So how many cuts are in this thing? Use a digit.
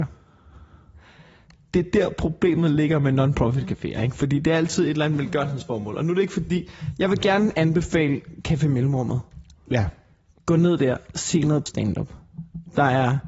1